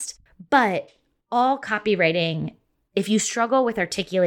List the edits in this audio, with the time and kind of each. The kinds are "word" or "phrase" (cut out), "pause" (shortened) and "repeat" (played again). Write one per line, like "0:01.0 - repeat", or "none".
none

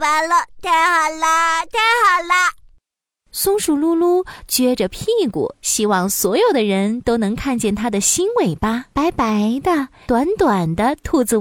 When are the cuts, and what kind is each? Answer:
0:05.6 - pause
0:08.9 - pause
0:10.1 - phrase

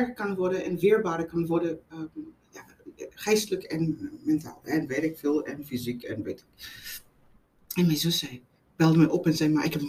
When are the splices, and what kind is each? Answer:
none

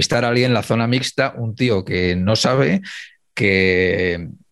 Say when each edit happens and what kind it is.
none

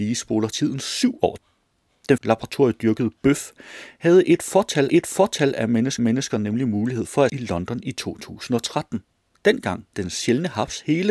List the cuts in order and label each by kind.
0:01.4 - word
0:02.2 - word
0:04.9 - repeat
0:06.0 - repeat
0:07.3 - word
0:09.9 - word

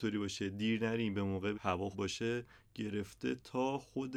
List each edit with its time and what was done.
0:01.5 - word
0:01.9 - word

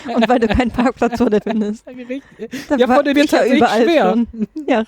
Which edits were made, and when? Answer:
0:01.4 - word
0:03.1 - word

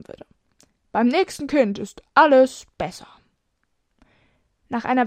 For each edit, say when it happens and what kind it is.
none

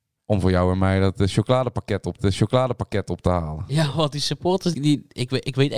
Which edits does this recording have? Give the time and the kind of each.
0:02.2 - repeat
0:04.7 - word

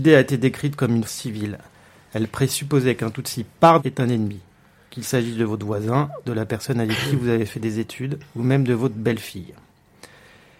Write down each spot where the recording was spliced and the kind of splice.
0:01.1 - phrase
0:03.8 - word

